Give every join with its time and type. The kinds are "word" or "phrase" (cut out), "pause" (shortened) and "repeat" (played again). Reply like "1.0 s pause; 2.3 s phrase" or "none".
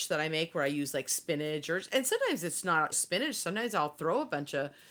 2.9 s word